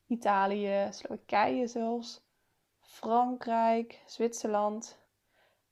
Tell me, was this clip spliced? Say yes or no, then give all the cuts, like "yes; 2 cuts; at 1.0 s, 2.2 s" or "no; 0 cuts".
no; 0 cuts